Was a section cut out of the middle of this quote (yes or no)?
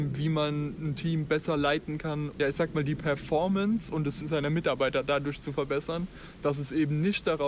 yes